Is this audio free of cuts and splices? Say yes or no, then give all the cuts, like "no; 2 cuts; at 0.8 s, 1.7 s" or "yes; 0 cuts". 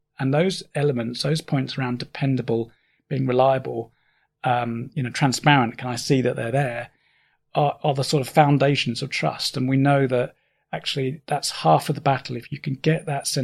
yes; 0 cuts